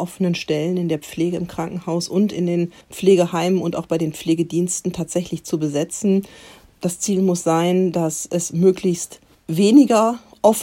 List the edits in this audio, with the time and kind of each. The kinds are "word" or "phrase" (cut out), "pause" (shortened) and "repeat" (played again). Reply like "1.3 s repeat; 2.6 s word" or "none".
2.8 s pause; 9.3 s pause